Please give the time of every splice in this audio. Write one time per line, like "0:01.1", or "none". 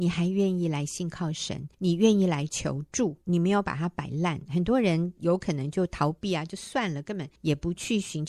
0:01.7
0:03.2
0:07.4